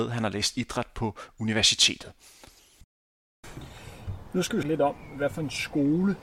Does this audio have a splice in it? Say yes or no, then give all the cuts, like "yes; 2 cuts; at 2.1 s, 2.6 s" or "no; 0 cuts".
yes; 1 cut; at 4.6 s